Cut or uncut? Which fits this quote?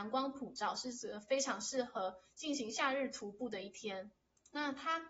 uncut